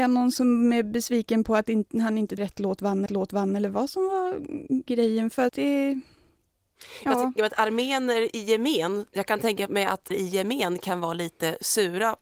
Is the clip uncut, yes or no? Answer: no